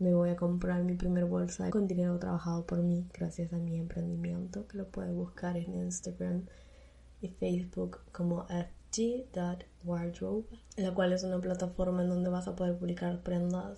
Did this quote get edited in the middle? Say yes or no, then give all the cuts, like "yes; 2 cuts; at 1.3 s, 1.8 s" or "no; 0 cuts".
yes; 1 cut; at 1.7 s